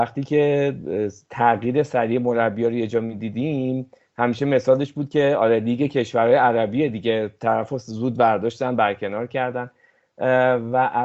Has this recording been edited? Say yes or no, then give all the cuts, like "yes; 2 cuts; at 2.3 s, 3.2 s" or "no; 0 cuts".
no; 0 cuts